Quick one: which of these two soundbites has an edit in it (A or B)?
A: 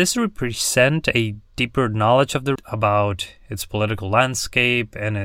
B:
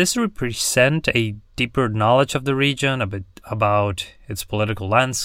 A